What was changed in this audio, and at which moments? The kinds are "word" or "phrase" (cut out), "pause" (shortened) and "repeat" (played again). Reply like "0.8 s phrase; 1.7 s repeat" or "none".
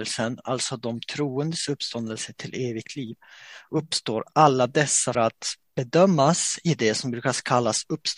5.1 s word